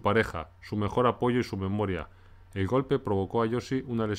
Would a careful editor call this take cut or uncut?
uncut